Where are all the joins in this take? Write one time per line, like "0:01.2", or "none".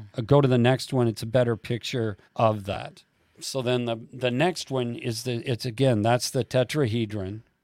0:02.3
0:03.1